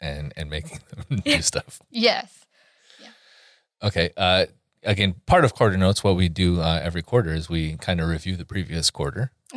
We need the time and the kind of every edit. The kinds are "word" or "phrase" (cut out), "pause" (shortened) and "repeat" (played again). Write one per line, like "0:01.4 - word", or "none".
none